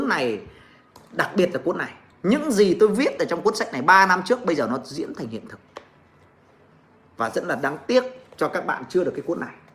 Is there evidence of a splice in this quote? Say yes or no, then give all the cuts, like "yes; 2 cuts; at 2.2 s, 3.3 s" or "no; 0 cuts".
no; 0 cuts